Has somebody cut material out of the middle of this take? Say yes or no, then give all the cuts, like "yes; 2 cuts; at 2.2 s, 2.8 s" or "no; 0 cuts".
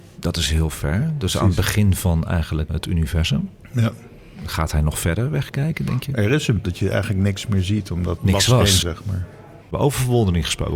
yes; 5 cuts; at 2.7 s, 6.6 s, 8.2 s, 8.8 s, 9.6 s